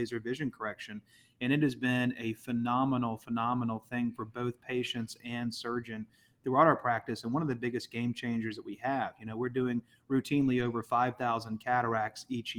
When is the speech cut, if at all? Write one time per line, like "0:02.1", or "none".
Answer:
none